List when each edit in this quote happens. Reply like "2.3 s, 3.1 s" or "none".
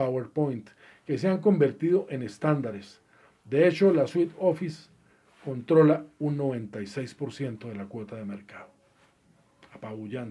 none

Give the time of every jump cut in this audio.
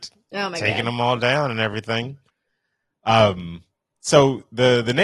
none

